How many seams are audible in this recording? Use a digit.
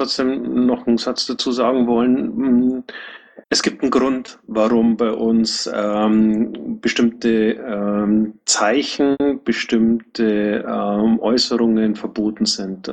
1